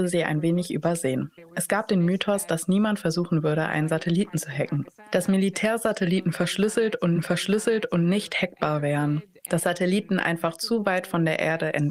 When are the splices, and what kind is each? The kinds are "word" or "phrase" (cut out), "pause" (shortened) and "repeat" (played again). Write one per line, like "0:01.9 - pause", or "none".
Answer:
0:07.1 - repeat